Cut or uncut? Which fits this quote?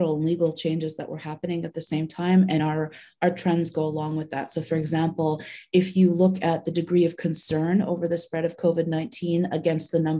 uncut